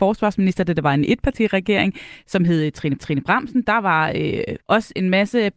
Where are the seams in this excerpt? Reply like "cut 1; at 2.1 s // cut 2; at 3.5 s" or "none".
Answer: cut 1; at 3.0 s // cut 2; at 4.6 s